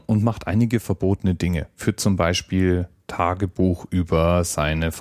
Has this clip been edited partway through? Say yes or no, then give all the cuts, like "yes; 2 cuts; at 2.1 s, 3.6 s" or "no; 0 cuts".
no; 0 cuts